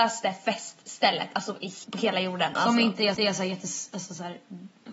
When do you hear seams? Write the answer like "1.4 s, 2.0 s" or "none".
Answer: 1.8 s, 3.1 s